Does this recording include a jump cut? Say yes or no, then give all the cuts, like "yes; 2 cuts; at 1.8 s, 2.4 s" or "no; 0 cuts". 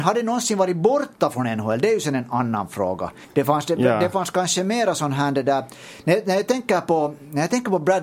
no; 0 cuts